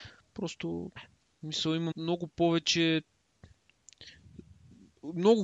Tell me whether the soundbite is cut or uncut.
cut